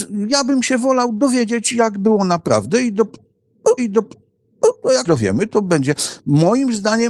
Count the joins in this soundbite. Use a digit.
2